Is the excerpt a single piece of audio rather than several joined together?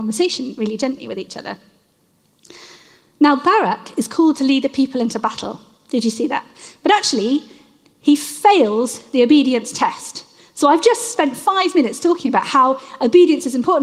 yes; 0 cuts

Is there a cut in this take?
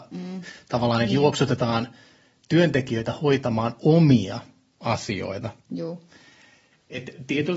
no; 0 cuts

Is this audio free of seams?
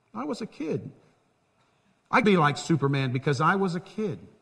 no; 1 cut; at 2.2 s

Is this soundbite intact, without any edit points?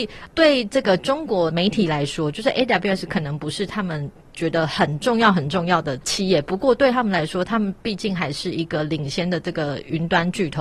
yes; 0 cuts

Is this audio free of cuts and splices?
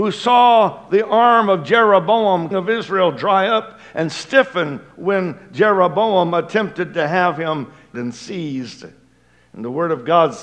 no; 2 cuts; at 2.5 s, 7.9 s

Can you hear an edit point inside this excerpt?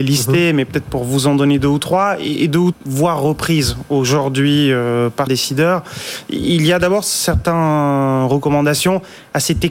yes; 2 cuts; at 2.7 s, 5.3 s

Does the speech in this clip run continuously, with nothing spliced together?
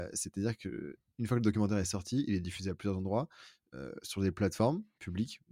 yes; 0 cuts

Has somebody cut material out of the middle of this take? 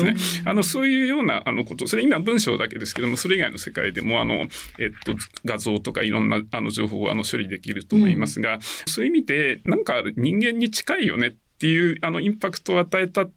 yes; 1 cut; at 8.9 s

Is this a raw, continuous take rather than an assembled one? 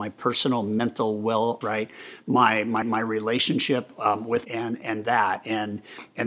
no; 3 cuts; at 1.6 s, 2.8 s, 4.4 s

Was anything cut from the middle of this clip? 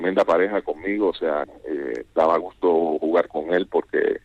yes; 2 cuts; at 1.4 s, 2.1 s

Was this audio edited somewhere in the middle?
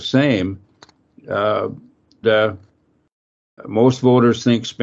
yes; 2 cuts; at 2.2 s, 3.6 s

